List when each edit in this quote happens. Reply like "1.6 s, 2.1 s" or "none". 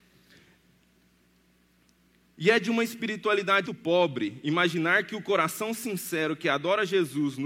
3.7 s